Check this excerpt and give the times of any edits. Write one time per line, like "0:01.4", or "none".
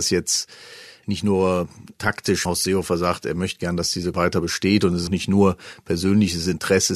0:02.5
0:04.1
0:05.1